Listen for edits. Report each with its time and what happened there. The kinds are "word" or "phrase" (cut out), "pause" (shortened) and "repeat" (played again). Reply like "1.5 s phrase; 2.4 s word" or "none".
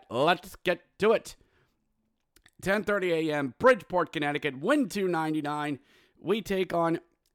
none